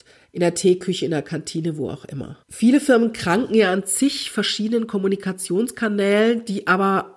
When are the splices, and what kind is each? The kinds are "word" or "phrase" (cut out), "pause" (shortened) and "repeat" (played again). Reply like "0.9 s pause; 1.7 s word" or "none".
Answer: 2.4 s pause